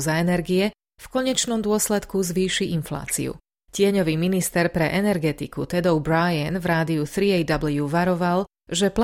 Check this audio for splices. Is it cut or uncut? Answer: uncut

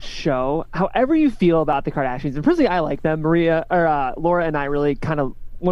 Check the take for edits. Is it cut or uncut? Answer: uncut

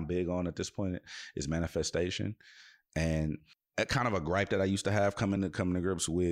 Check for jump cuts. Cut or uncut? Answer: uncut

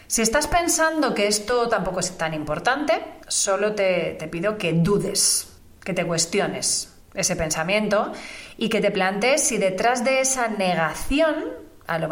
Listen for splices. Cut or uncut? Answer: uncut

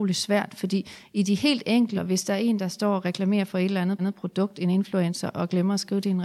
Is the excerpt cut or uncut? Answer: cut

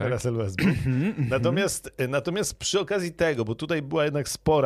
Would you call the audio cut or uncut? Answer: uncut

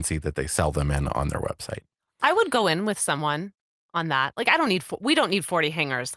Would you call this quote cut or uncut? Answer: uncut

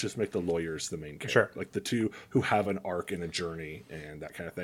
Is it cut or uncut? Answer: uncut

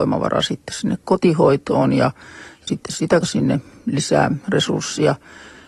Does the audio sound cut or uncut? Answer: cut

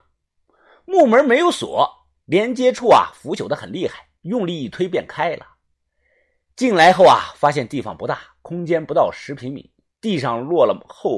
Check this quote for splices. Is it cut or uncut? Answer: uncut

